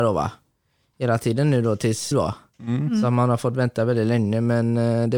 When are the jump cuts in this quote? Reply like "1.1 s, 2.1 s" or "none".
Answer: 2.1 s